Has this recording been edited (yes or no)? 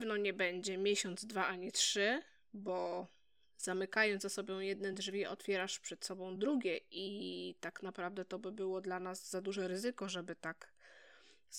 no